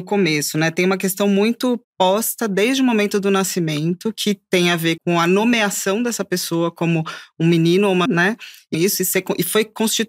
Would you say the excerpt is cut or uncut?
cut